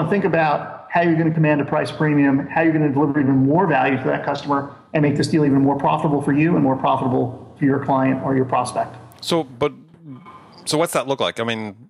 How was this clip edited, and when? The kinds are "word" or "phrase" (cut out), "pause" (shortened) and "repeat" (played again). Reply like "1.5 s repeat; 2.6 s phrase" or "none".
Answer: none